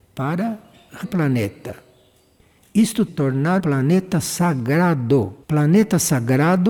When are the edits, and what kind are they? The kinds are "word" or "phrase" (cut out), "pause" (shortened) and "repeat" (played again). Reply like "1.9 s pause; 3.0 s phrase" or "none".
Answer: 1.0 s word; 3.1 s phrase; 3.6 s word; 5.4 s pause